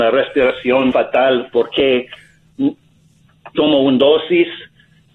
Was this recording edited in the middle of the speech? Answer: yes; 2 cuts; at 0.9 s, 3.5 s

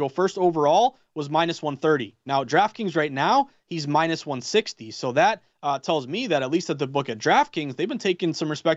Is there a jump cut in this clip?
no; 0 cuts

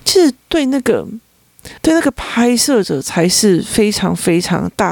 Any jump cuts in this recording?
yes; 1 cut; at 1.8 s

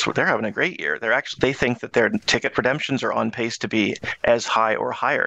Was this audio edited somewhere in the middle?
no; 0 cuts

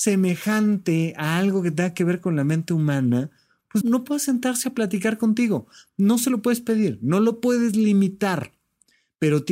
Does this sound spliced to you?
yes; 1 cut; at 3.8 s

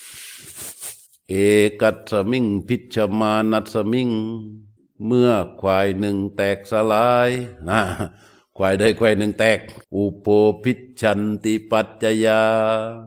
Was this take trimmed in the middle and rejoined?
yes; 3 cuts; at 1.1 s, 4.8 s, 9.8 s

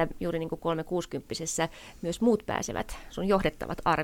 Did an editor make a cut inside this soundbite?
no; 0 cuts

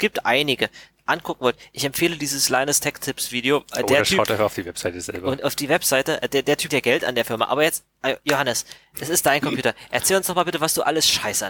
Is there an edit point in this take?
yes; 1 cut; at 6.7 s

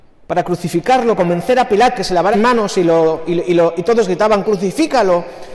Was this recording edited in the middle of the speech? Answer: yes; 4 cuts; at 1.2 s, 1.9 s, 2.3 s, 4.4 s

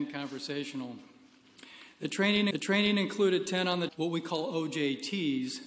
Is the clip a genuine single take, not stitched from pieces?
no; 2 cuts; at 2.5 s, 3.9 s

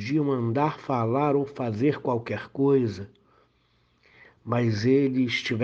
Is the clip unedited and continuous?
yes; 0 cuts

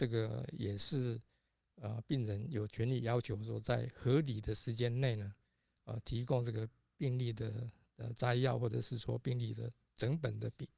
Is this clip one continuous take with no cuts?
yes; 0 cuts

